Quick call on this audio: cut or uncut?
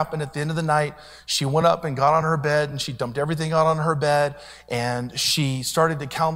uncut